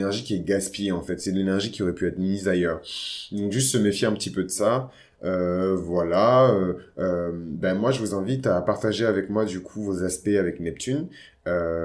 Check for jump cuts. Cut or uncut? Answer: uncut